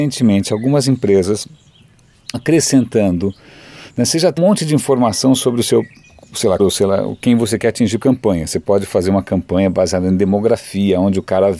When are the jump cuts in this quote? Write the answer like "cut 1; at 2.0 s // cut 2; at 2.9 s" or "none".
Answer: cut 1; at 2.3 s // cut 2; at 4.4 s // cut 3; at 6.6 s // cut 4; at 8.0 s